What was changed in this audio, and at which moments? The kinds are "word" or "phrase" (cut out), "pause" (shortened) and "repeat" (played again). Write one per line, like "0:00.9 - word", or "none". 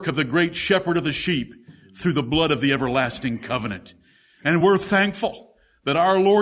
none